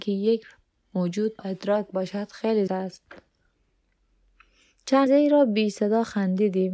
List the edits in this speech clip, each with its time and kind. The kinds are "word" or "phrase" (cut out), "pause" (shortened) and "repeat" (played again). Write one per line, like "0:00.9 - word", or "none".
0:01.4 - word
0:02.7 - word
0:05.1 - word

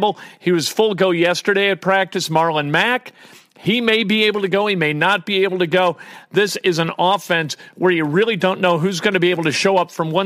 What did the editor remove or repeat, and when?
none

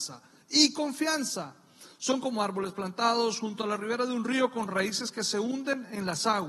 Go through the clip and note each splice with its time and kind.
none

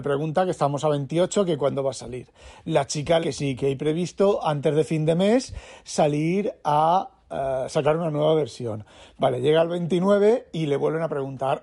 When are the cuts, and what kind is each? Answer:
0:03.2 - phrase

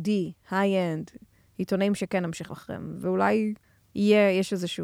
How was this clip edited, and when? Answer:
0:02.5 - word

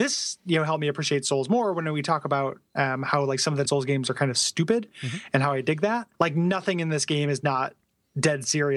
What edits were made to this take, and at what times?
0:03.6 - phrase
0:06.1 - pause

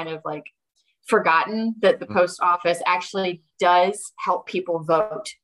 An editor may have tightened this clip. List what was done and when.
none

